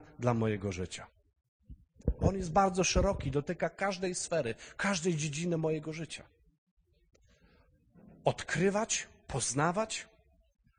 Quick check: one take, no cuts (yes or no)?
yes